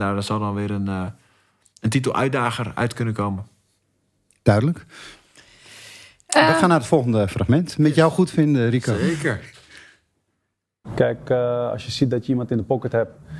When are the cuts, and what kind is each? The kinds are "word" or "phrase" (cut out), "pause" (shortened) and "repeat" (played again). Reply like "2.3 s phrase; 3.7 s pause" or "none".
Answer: none